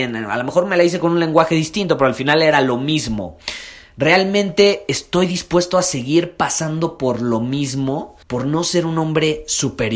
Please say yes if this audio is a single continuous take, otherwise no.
no